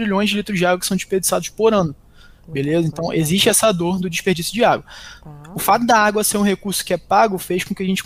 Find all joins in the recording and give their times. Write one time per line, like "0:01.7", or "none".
none